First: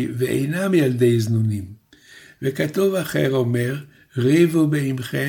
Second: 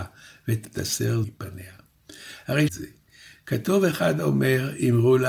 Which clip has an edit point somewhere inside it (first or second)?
second